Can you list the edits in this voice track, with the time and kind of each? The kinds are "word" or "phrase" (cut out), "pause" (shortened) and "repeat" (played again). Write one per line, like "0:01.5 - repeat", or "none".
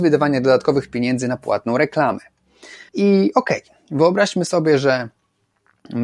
0:02.9 - pause